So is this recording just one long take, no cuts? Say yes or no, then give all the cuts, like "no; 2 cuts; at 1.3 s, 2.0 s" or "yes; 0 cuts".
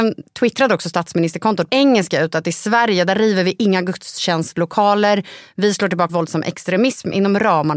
no; 2 cuts; at 1.7 s, 6.1 s